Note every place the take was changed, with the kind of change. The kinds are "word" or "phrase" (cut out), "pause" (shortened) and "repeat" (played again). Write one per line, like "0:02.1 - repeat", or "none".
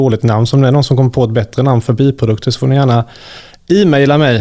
none